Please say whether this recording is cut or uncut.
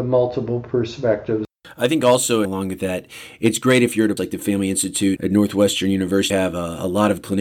cut